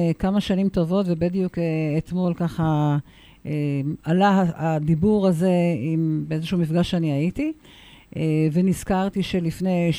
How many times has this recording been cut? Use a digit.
0